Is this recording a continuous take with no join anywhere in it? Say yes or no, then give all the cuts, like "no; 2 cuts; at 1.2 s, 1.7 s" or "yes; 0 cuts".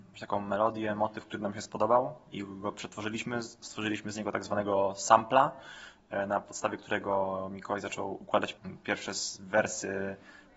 yes; 0 cuts